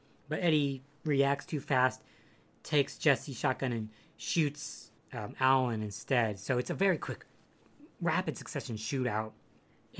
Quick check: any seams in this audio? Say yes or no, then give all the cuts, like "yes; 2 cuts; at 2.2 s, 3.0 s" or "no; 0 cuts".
no; 0 cuts